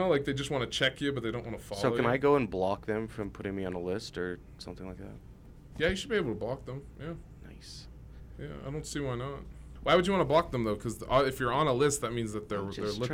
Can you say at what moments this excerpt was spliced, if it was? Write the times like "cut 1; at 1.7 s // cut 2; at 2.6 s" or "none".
none